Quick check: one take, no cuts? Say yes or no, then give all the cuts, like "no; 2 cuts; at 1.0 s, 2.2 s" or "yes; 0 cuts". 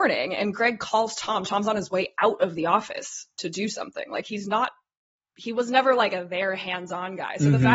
yes; 0 cuts